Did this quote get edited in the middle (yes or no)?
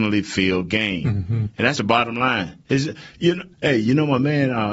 yes